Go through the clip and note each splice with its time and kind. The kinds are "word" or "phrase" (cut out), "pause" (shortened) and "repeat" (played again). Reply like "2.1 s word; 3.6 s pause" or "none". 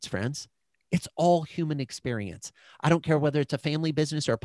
none